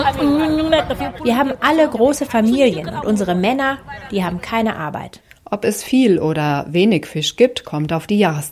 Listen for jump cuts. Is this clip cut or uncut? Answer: uncut